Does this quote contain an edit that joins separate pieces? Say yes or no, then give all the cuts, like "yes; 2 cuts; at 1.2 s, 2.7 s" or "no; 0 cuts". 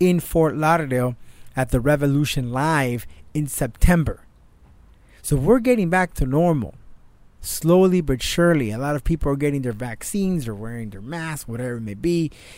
no; 0 cuts